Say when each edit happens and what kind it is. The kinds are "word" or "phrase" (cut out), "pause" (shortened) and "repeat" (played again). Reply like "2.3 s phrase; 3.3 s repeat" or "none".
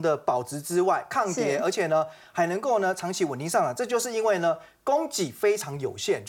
none